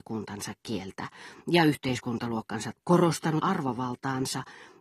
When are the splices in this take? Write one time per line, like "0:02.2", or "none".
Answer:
0:02.8
0:03.4

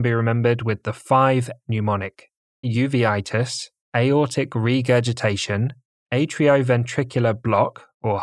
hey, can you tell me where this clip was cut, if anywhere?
0:01.6
0:02.6
0:03.8
0:05.9

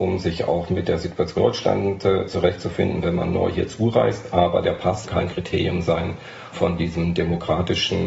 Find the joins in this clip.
0:01.4
0:05.0
0:06.5

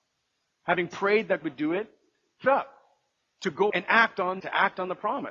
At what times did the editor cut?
0:01.4
0:02.4
0:03.7
0:04.4

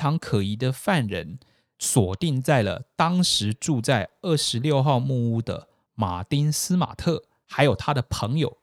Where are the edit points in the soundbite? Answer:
none

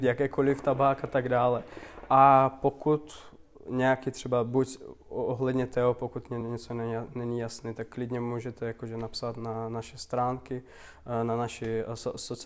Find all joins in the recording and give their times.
none

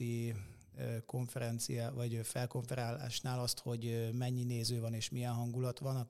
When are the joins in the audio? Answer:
none

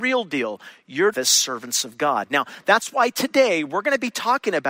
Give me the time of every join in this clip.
0:01.1

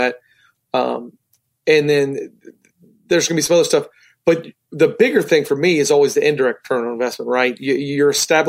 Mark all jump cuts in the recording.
none

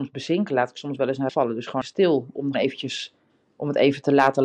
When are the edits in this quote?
0:01.3
0:01.8
0:02.5

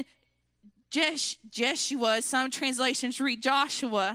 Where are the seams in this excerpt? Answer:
none

